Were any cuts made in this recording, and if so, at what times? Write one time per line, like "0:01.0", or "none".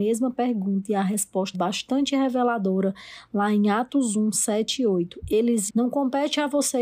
0:01.5
0:05.7